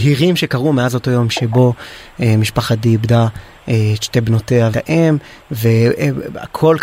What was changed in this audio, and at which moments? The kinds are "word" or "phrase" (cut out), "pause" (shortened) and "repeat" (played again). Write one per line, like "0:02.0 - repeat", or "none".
0:01.3 - word
0:04.7 - word